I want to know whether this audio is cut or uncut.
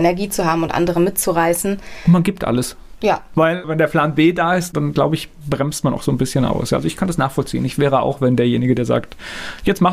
uncut